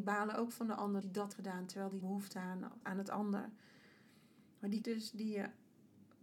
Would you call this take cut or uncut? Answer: cut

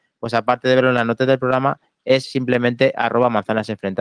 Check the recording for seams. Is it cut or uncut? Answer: uncut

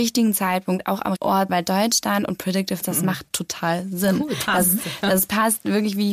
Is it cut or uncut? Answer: cut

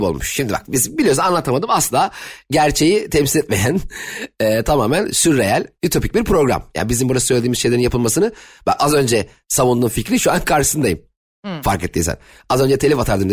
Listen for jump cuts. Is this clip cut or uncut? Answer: uncut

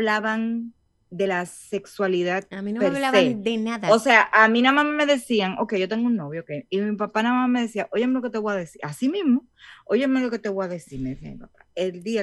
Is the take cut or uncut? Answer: uncut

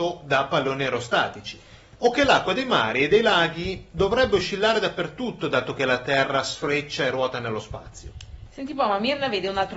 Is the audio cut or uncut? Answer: uncut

